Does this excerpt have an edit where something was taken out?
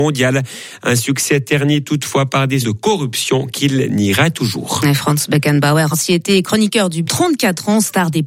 yes; 3 cuts; at 2.6 s, 5.9 s, 7.0 s

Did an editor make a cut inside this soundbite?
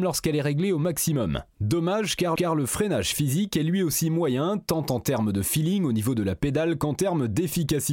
yes; 2 cuts; at 1.5 s, 2.4 s

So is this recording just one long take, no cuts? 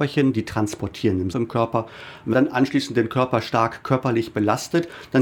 no; 2 cuts; at 1.3 s, 2.3 s

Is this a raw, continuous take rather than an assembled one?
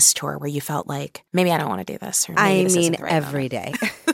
no; 1 cut; at 1.3 s

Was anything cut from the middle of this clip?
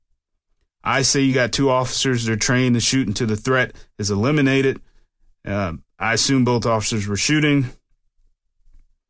no; 0 cuts

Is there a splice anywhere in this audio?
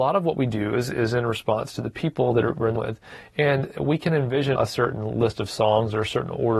yes; 2 cuts; at 2.8 s, 4.6 s

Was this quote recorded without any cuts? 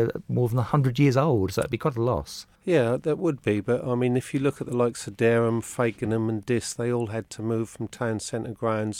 no; 1 cut; at 2.5 s

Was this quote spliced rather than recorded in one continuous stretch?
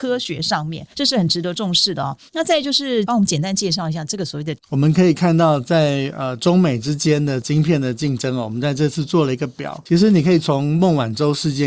yes; 3 cuts; at 0.9 s, 2.3 s, 4.6 s

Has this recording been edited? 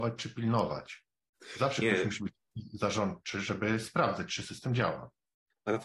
no; 0 cuts

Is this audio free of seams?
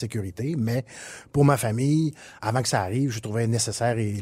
yes; 0 cuts

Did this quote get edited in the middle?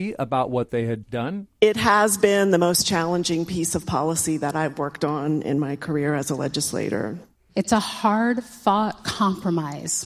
yes; 2 cuts; at 1.0 s, 7.3 s

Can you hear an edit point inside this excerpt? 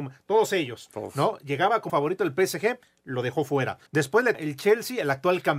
yes; 3 cuts; at 1.9 s, 3.9 s, 4.3 s

